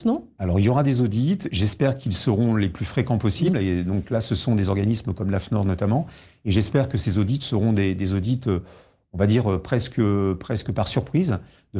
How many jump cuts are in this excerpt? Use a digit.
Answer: 0